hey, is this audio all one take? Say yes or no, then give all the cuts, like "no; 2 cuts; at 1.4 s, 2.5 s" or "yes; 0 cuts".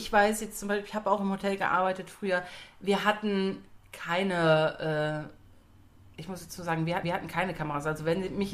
no; 1 cut; at 7.0 s